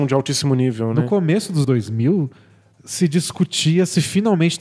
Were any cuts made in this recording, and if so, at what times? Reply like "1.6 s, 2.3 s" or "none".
1.6 s